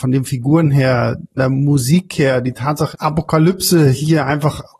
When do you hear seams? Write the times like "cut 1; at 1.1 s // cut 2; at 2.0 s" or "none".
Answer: cut 1; at 1.4 s // cut 2; at 2.9 s